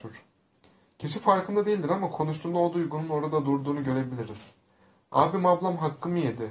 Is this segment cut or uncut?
uncut